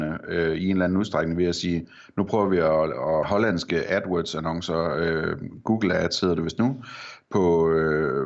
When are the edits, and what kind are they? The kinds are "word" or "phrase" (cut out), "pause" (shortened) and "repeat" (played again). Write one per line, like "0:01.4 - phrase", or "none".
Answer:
0:03.2 - phrase